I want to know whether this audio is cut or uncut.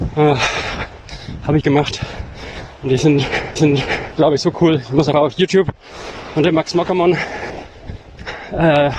cut